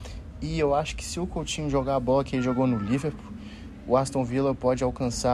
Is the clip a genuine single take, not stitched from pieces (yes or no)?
yes